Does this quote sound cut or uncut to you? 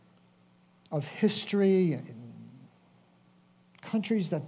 uncut